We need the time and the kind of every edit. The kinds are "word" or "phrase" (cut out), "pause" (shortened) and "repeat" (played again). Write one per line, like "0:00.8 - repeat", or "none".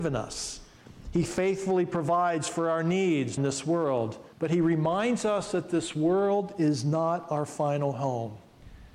0:03.4 - phrase
0:04.3 - pause